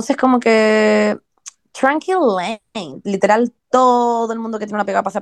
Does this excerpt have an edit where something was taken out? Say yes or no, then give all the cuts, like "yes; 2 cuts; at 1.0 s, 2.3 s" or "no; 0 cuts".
no; 0 cuts